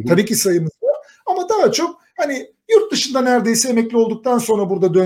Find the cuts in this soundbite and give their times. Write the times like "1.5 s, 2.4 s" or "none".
none

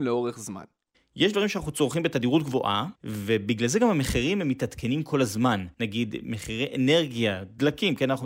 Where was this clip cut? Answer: 3.0 s, 5.7 s

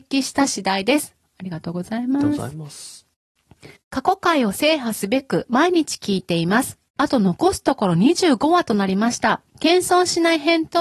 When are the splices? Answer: 3.8 s, 9.5 s

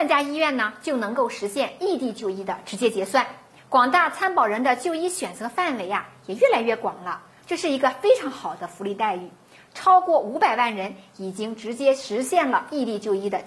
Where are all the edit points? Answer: none

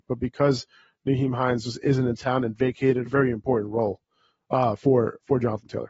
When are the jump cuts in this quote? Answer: 3.1 s

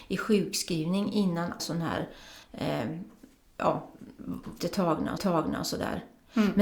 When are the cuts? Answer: 1.6 s, 2.4 s, 4.6 s, 5.2 s

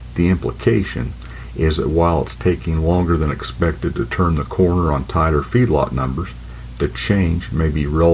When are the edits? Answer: none

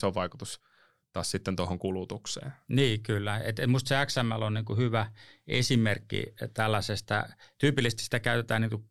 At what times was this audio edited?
none

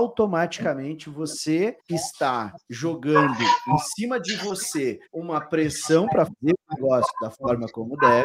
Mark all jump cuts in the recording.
1.8 s, 5.1 s, 6.3 s

